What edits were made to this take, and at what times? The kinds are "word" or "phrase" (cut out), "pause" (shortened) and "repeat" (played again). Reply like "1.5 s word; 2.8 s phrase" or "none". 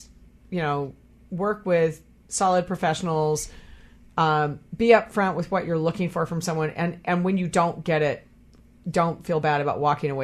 none